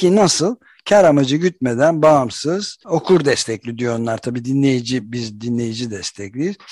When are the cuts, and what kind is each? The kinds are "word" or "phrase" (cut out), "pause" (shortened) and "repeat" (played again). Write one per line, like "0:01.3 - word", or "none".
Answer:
0:02.8 - pause